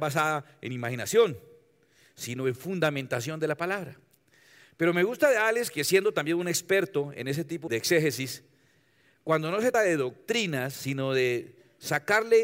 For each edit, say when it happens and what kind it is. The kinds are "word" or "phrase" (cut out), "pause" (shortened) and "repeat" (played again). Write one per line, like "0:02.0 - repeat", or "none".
0:07.7 - word
0:09.7 - word